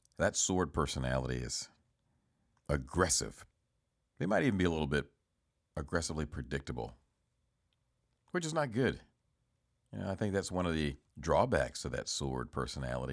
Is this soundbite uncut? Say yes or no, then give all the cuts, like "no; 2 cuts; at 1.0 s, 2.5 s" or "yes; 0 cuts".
yes; 0 cuts